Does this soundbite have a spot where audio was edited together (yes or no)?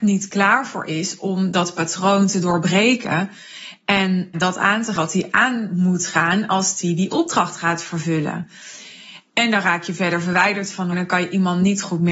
yes